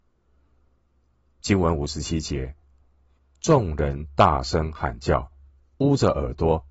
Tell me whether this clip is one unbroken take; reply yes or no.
yes